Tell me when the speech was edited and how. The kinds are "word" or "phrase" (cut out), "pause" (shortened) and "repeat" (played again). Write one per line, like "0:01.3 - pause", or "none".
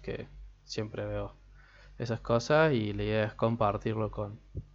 none